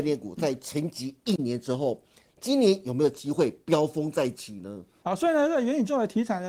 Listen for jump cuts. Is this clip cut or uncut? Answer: uncut